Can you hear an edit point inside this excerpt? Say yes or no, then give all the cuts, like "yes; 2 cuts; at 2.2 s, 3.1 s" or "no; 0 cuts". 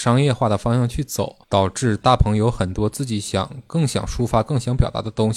yes; 1 cut; at 1.4 s